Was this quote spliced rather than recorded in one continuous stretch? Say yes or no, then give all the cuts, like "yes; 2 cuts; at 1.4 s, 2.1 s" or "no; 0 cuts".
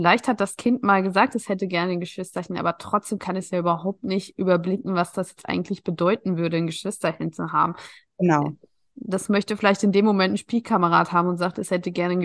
no; 0 cuts